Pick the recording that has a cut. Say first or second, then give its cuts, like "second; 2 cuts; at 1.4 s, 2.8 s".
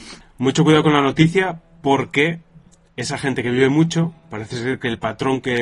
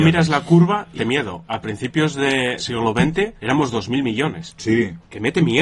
second; 3 cuts; at 1.0 s, 2.6 s, 3.4 s